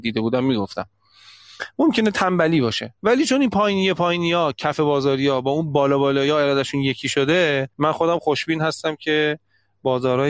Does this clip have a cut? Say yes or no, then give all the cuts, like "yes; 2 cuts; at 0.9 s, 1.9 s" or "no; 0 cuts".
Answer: yes; 2 cuts; at 3.0 s, 7.7 s